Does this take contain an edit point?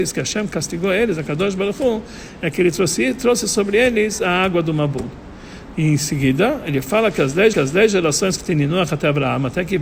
yes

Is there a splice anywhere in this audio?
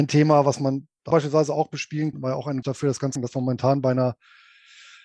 yes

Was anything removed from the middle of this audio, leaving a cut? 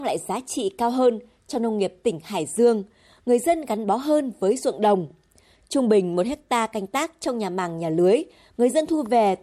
no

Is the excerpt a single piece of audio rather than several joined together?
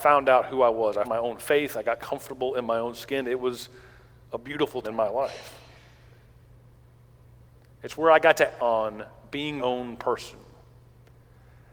no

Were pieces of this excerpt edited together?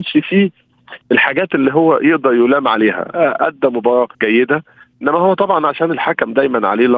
yes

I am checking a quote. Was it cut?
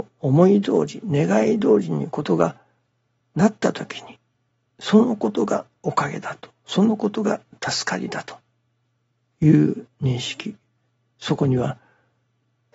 no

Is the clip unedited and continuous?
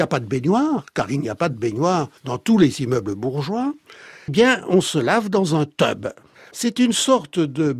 no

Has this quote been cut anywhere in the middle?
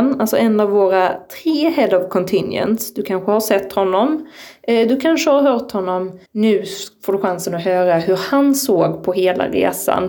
yes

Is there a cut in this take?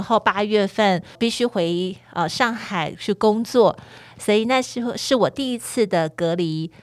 yes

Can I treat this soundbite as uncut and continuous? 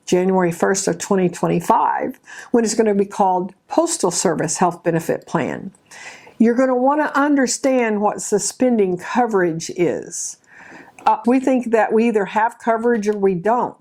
no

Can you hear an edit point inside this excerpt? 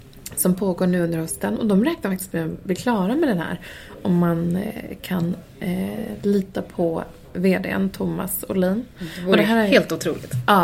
no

